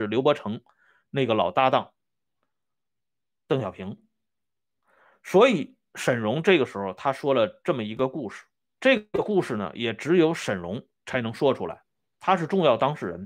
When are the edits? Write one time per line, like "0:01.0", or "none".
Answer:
none